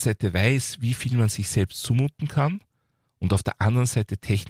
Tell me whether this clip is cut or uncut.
uncut